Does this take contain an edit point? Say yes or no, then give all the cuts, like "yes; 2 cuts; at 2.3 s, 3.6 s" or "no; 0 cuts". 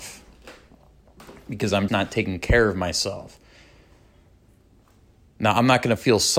yes; 1 cut; at 1.9 s